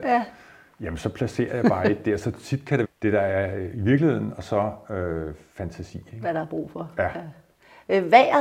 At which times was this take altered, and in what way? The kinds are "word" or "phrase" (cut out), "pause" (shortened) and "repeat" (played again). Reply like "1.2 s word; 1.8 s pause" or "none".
2.8 s phrase